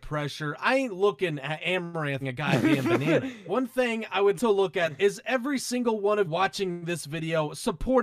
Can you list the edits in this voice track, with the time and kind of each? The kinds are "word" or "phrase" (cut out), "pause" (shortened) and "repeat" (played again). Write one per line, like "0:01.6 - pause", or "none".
0:02.2 - word
0:04.4 - word
0:05.0 - word
0:06.2 - word

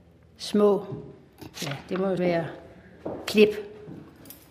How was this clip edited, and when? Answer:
0:01.5 - pause
0:02.2 - word

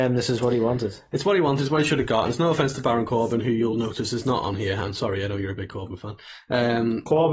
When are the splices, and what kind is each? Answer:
none

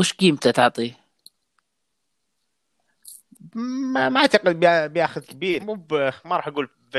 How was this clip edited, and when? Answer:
0:05.2 - word
0:05.6 - word

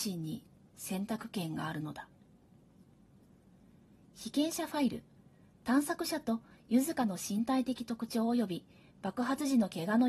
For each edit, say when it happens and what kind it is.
none

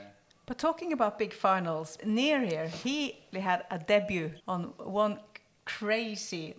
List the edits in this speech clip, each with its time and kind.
0:02.0 - word
0:03.3 - word
0:04.4 - pause

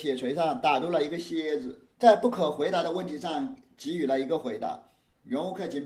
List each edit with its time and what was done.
0:01.9 - pause

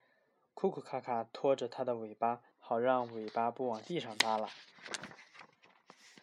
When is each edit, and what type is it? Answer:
0:02.5 - pause

